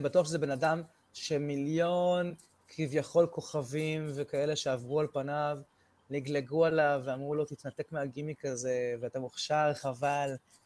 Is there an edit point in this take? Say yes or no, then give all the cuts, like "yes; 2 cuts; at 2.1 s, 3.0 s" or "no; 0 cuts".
no; 0 cuts